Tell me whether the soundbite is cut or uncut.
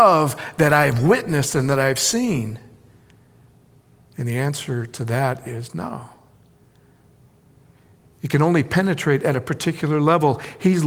uncut